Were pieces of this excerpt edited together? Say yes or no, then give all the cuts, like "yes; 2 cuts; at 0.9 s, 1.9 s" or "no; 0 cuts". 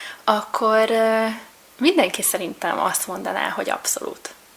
no; 0 cuts